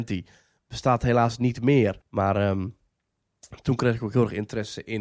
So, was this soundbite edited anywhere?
yes; 1 cut; at 2.0 s

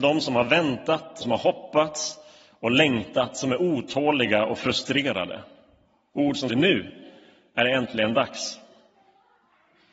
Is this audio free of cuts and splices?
no; 2 cuts; at 1.2 s, 6.5 s

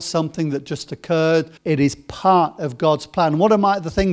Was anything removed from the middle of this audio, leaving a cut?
yes; 1 cut; at 1.6 s

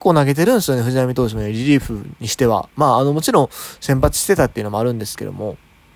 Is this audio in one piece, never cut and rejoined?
yes; 0 cuts

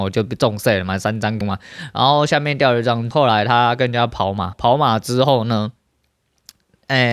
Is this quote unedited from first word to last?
no; 3 cuts; at 1.4 s, 3.1 s, 4.5 s

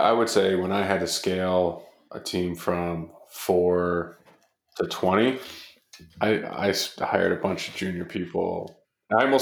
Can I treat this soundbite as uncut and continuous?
yes; 0 cuts

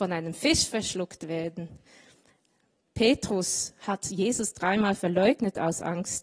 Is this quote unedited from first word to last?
yes; 0 cuts

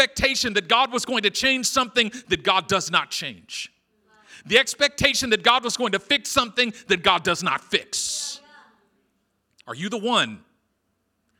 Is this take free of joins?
yes; 0 cuts

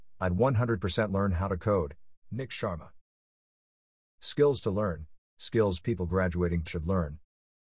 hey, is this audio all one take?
no; 4 cuts; at 2.2 s, 3.6 s, 5.2 s, 6.7 s

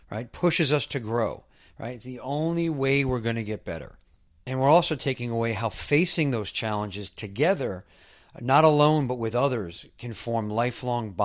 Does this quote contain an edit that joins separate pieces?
no; 0 cuts

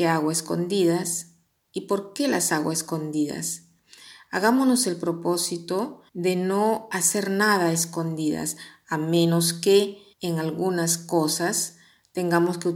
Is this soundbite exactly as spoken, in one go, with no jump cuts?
no; 2 cuts; at 6.1 s, 10.1 s

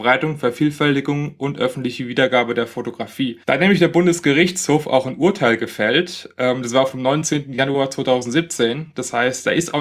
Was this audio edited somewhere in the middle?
yes; 1 cut; at 3.4 s

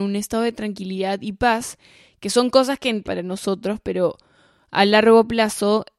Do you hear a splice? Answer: yes; 1 cut; at 3.0 s

